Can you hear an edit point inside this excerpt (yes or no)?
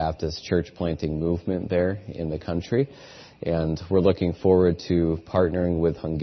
no